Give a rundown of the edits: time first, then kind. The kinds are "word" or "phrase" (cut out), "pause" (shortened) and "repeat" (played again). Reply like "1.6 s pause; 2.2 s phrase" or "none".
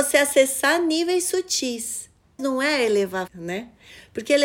2.4 s word; 3.3 s word